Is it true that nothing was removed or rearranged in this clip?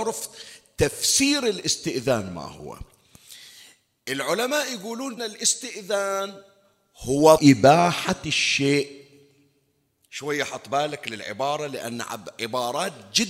no; 2 cuts; at 5.2 s, 7.4 s

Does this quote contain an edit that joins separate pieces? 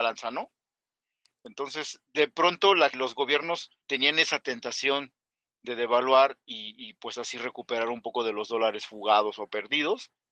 yes; 2 cuts; at 2.9 s, 3.8 s

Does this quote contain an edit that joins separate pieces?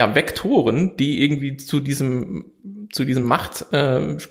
no; 0 cuts

